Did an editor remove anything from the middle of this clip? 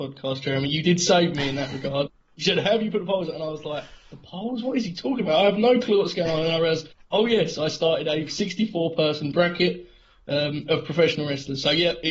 no; 0 cuts

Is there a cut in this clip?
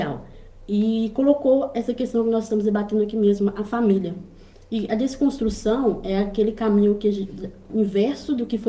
no; 0 cuts

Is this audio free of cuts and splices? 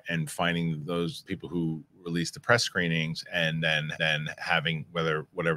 no; 2 cuts; at 1.3 s, 4.0 s

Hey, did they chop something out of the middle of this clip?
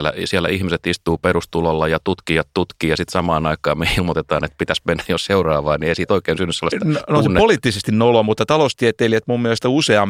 no; 0 cuts

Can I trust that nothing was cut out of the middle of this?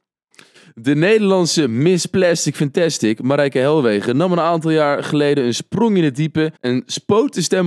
no; 1 cut; at 6.6 s

